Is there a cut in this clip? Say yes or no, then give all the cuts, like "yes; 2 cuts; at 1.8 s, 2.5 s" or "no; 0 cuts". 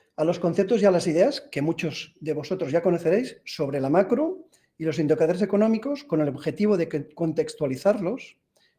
no; 0 cuts